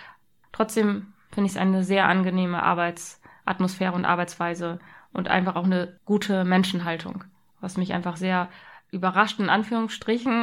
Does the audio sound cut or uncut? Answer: uncut